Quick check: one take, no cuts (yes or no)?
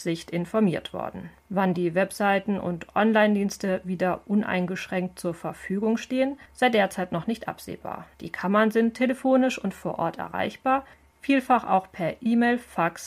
no